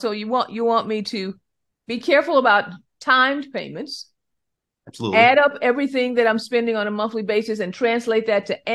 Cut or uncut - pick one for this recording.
uncut